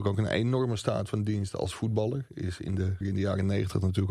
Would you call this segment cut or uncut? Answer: cut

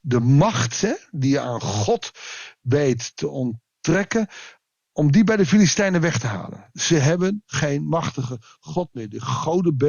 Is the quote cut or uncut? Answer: uncut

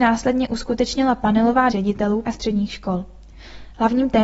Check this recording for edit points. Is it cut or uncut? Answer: cut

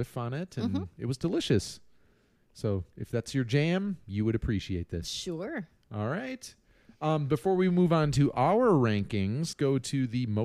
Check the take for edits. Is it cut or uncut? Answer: cut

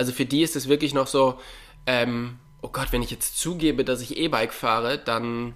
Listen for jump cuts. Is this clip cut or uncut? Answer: uncut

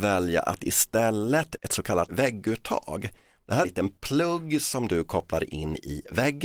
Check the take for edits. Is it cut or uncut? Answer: cut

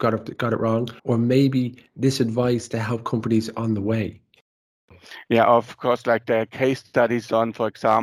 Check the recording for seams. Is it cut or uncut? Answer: cut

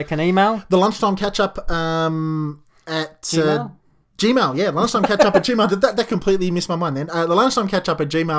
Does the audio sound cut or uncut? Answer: uncut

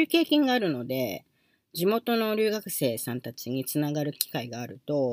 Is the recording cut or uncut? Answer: uncut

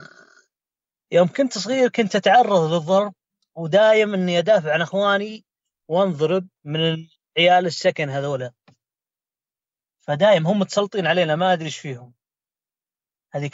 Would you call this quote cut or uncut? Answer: cut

